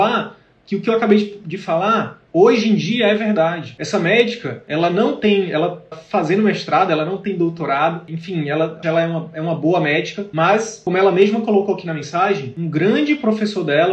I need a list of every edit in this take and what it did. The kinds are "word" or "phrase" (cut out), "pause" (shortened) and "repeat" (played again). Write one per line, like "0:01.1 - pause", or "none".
0:02.3 - pause
0:05.9 - word
0:08.8 - word